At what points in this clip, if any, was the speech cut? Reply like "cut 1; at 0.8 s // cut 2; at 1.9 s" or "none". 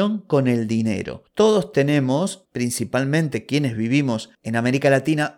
none